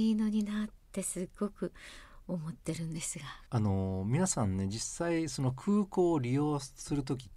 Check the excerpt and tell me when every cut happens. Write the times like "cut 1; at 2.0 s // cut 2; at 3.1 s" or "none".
cut 1; at 3.4 s